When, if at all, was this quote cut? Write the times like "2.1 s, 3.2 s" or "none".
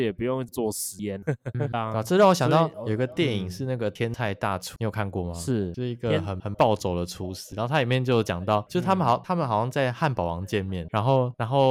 1.7 s